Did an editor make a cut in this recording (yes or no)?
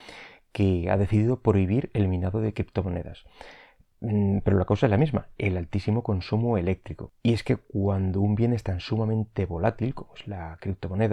no